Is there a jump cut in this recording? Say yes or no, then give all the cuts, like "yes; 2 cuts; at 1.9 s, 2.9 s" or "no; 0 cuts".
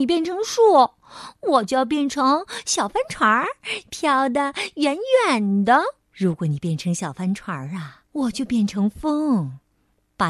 yes; 2 cuts; at 6.0 s, 8.1 s